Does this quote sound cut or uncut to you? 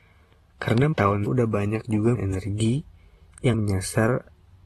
cut